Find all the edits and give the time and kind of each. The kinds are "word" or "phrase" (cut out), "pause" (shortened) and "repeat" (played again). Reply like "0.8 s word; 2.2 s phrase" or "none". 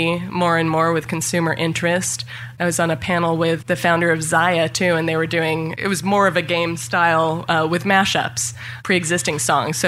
none